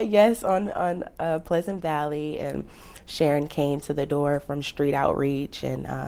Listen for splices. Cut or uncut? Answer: uncut